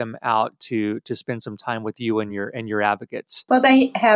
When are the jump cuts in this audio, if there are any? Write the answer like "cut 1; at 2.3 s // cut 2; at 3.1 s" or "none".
none